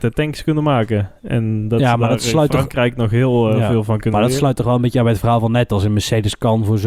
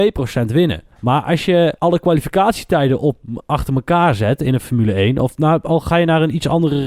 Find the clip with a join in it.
second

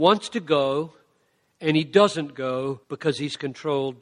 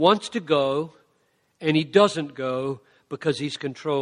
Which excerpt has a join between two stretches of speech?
first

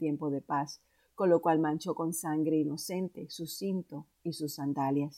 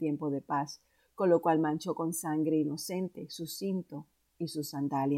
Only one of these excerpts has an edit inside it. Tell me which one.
first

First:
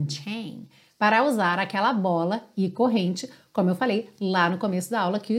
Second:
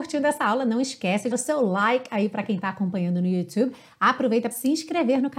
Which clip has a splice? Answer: second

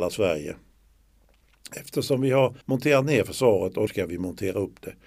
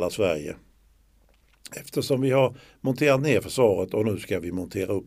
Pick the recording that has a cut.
first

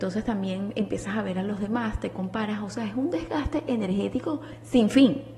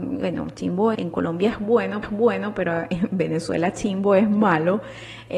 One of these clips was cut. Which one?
second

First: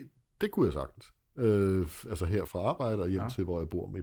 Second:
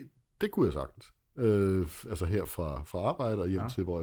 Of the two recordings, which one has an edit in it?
first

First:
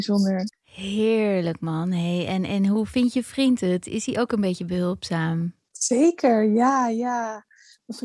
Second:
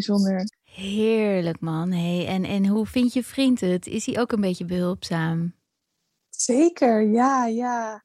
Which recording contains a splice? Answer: first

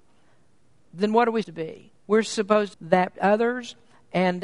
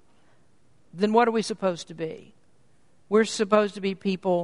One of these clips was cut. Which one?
first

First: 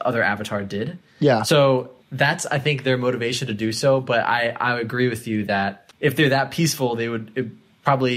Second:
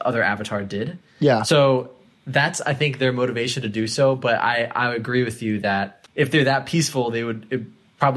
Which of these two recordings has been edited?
first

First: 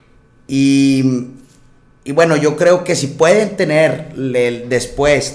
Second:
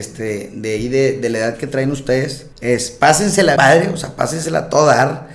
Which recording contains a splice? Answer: second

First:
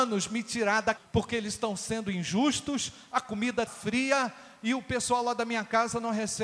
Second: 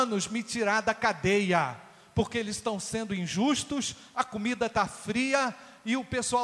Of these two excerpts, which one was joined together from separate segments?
first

